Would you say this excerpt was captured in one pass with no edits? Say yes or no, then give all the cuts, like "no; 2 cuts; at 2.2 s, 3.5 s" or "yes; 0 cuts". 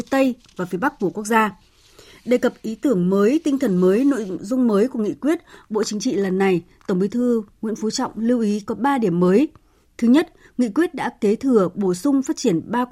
yes; 0 cuts